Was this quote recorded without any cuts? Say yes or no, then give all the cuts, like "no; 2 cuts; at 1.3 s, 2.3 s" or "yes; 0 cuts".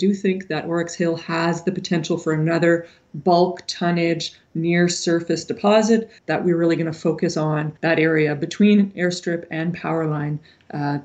no; 2 cuts; at 6.2 s, 7.8 s